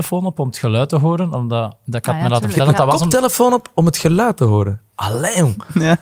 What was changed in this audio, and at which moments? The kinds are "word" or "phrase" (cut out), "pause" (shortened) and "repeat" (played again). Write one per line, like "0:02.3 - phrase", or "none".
none